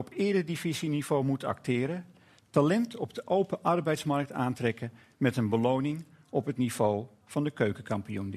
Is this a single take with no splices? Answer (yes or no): yes